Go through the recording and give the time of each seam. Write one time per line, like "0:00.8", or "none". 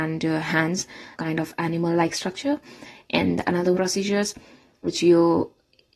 0:01.1
0:03.7